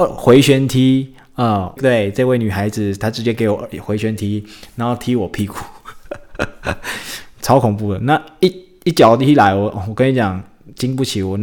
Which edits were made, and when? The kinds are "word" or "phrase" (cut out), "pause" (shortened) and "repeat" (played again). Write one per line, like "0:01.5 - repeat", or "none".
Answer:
0:01.8 - word